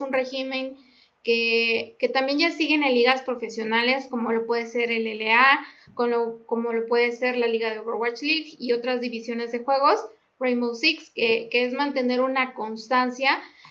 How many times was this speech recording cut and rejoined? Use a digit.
0